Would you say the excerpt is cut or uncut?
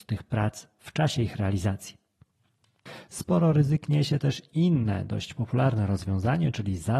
uncut